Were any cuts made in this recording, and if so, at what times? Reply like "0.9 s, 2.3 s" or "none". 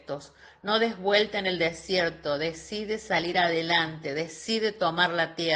none